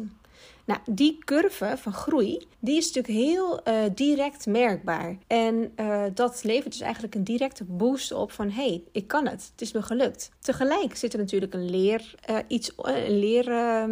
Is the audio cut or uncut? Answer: cut